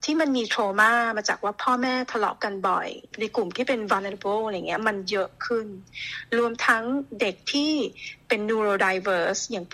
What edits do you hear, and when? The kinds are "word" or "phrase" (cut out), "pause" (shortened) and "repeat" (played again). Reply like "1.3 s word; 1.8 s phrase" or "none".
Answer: none